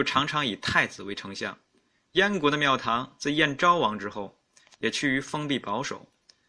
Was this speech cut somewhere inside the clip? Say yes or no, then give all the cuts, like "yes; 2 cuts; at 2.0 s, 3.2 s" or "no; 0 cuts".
no; 0 cuts